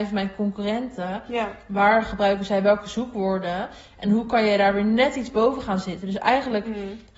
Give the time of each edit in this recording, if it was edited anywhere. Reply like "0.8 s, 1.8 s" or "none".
none

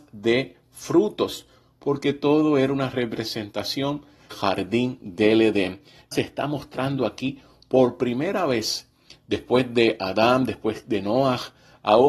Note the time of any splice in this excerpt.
4.3 s, 6.1 s

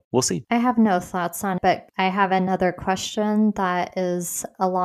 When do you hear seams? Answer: 1.6 s

